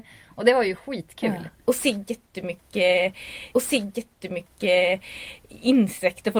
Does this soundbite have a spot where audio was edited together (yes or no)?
yes